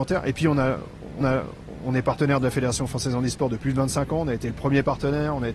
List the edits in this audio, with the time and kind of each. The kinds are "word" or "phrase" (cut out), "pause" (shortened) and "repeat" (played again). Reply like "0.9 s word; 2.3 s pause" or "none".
1.2 s repeat; 3.6 s word